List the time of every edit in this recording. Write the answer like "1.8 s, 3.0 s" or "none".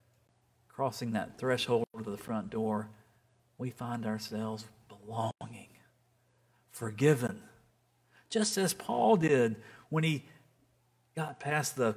none